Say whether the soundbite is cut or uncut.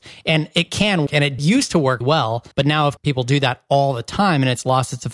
cut